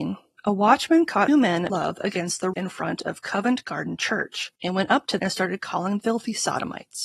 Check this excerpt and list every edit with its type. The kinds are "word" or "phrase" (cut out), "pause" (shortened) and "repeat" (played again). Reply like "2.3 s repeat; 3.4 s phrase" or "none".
1.3 s phrase; 1.7 s word; 2.5 s word; 4.6 s pause; 5.2 s word; 6.0 s word